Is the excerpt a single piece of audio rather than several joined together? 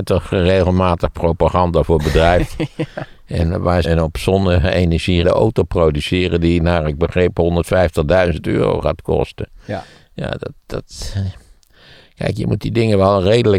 no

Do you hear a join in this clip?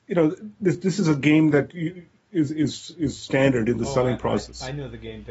no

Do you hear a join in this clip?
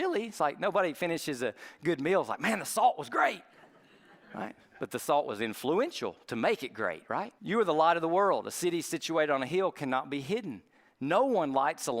yes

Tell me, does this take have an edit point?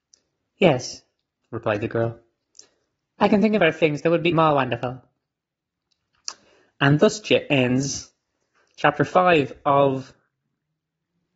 yes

